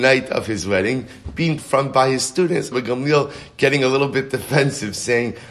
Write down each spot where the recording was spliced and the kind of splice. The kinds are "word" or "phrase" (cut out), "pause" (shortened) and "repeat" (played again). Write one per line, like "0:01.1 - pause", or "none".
0:01.6 - word
0:02.7 - word